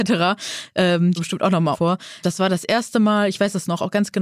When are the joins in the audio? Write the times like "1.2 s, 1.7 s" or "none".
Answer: 1.2 s, 1.7 s, 2.2 s